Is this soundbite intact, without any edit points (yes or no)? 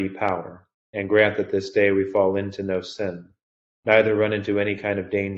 yes